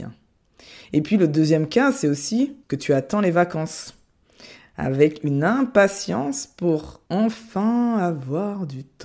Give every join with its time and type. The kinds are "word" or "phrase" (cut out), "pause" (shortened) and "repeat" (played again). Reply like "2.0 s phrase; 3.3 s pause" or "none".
2.6 s pause; 7.1 s pause